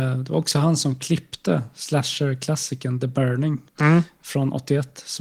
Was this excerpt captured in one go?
no; 1 cut; at 3.7 s

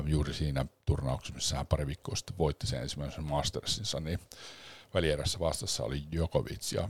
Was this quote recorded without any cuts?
yes; 0 cuts

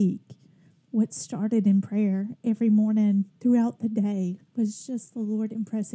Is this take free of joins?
no; 2 cuts; at 3.3 s, 4.5 s

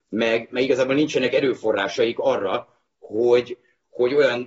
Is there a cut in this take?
no; 0 cuts

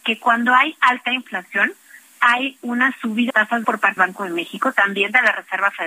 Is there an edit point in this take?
yes; 3 cuts; at 3.3 s, 3.6 s, 4.0 s

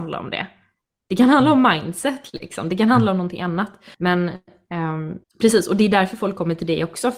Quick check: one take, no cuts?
no; 2 cuts; at 3.9 s, 5.2 s

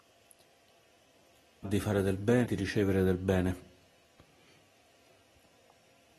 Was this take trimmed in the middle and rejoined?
yes; 2 cuts; at 1.6 s, 2.5 s

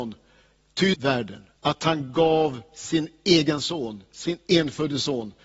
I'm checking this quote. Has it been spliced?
yes; 2 cuts; at 0.9 s, 1.6 s

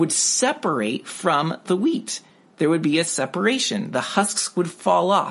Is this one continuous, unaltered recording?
yes; 0 cuts

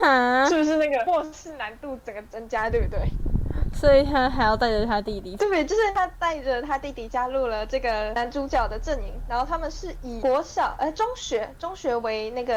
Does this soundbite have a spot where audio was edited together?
no; 0 cuts

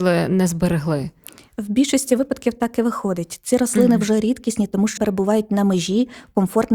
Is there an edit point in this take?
yes; 1 cut; at 5.0 s

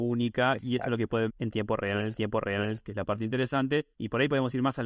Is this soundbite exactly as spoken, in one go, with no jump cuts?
no; 3 cuts; at 1.3 s, 2.2 s, 3.9 s

